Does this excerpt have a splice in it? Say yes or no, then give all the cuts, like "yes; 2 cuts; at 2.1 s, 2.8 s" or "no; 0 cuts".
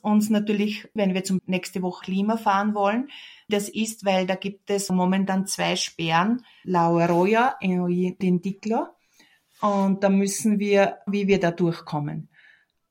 yes; 8 cuts; at 1.0 s, 1.4 s, 2.0 s, 3.5 s, 4.9 s, 6.6 s, 8.2 s, 11.1 s